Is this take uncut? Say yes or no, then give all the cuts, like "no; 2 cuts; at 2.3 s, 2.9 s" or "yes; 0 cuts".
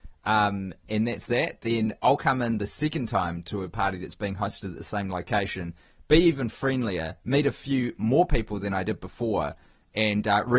yes; 0 cuts